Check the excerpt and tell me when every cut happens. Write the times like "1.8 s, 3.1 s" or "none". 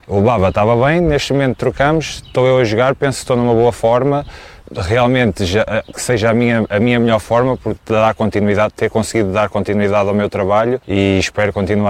5.9 s